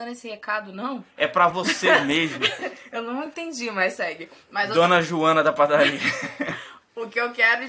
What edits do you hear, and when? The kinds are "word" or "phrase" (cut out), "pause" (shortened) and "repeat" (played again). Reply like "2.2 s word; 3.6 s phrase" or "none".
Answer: none